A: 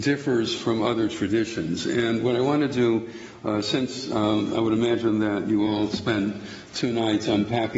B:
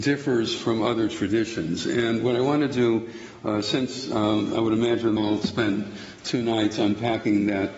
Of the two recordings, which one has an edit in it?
B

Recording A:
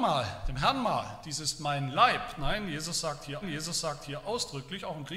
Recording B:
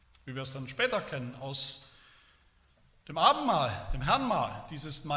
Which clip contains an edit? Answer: A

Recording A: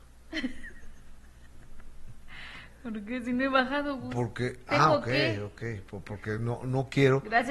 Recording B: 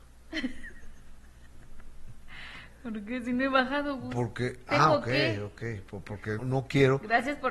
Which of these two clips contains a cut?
B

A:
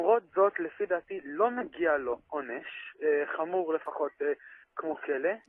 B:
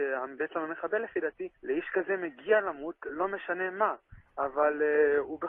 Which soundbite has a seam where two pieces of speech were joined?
B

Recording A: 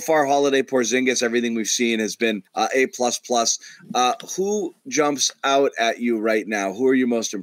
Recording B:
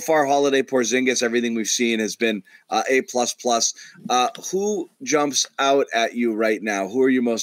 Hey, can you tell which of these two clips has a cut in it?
A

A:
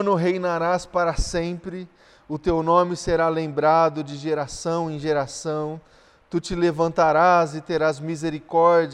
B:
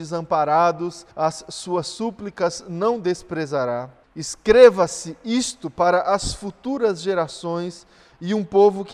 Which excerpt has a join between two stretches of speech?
B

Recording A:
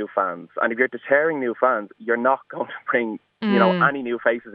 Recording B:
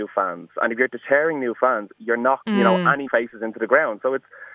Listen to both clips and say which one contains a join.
B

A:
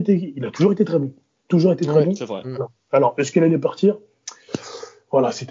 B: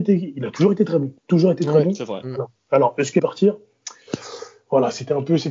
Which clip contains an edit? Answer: B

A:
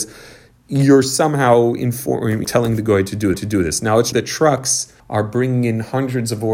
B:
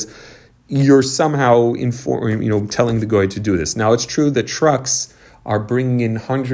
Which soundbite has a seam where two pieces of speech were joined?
A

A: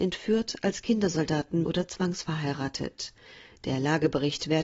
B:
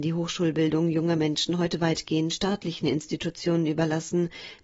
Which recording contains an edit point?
A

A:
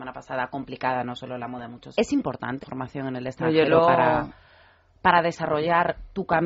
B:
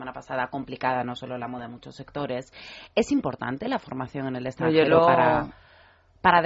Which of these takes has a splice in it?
A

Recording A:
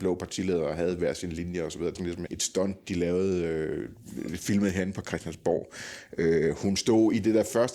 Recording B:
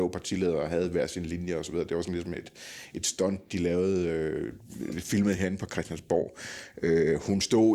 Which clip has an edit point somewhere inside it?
A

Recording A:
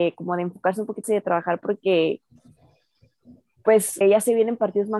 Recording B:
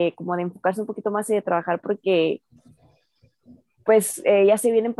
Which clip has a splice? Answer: A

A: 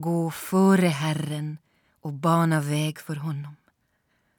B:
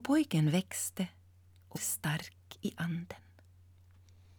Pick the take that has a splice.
B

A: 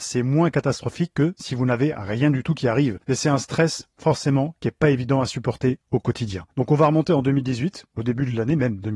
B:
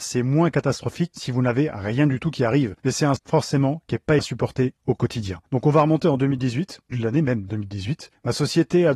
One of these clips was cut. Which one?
B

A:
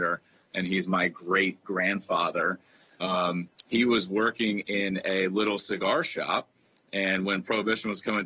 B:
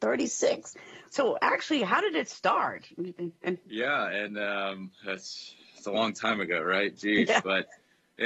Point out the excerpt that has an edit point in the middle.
B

